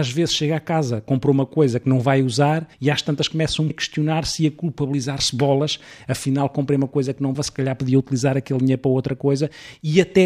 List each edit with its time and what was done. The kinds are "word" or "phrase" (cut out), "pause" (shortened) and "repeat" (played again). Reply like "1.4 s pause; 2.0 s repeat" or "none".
2.7 s pause; 3.7 s word; 7.3 s word